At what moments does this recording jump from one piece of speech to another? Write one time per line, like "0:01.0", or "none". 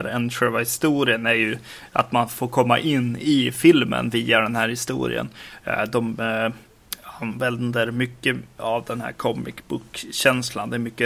none